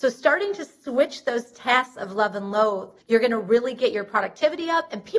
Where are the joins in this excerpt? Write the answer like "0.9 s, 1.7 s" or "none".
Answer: 3.0 s